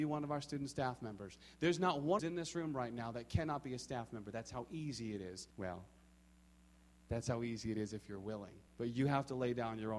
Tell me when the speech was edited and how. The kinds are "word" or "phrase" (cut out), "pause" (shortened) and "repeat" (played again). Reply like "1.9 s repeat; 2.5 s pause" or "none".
2.2 s phrase; 5.5 s pause; 8.7 s pause